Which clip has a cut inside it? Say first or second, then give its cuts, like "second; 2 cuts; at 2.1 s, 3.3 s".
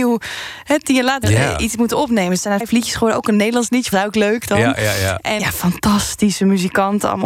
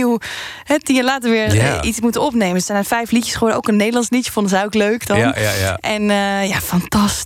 first; 4 cuts; at 1.2 s, 2.6 s, 3.9 s, 5.4 s